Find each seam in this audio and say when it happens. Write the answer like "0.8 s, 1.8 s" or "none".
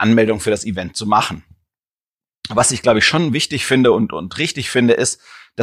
none